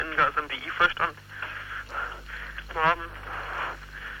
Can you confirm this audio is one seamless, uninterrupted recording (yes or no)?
no